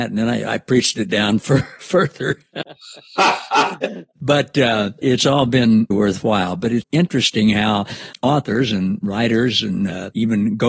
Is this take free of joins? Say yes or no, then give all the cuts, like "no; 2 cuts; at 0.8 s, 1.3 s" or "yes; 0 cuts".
no; 2 cuts; at 5.9 s, 6.8 s